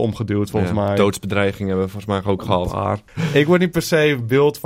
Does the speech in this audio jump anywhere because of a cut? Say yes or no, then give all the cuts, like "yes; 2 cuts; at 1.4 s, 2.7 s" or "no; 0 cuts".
no; 0 cuts